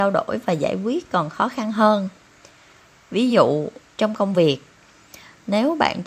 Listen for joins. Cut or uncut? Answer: uncut